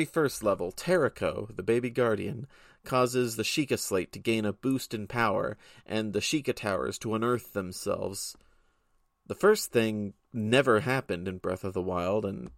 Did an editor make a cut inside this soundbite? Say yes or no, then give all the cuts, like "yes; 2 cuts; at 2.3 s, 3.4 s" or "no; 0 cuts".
no; 0 cuts